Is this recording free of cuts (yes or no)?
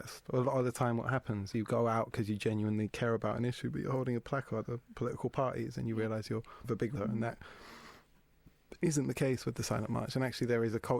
no